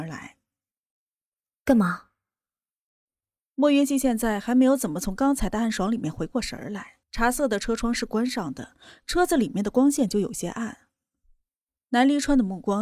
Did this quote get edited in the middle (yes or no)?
yes